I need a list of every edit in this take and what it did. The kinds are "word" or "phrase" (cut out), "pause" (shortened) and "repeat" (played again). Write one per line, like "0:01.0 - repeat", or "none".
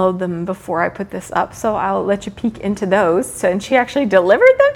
none